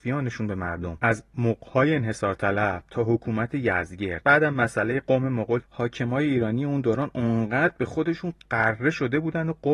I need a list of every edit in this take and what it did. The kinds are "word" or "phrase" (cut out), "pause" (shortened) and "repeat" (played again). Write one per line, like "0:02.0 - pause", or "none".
0:05.6 - word

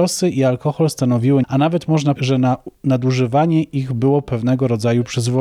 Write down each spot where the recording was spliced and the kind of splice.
0:01.4 - phrase
0:02.2 - word

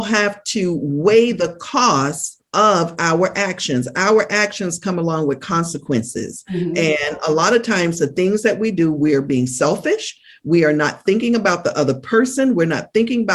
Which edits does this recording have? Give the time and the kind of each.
0:02.5 - pause

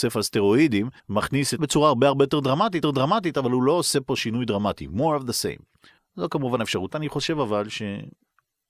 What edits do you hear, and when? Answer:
0:01.0 - pause
0:01.6 - word
0:02.8 - repeat
0:06.0 - pause
0:06.9 - word

